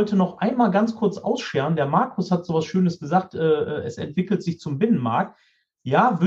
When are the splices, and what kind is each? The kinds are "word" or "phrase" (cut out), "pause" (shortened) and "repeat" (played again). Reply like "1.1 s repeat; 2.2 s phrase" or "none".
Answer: none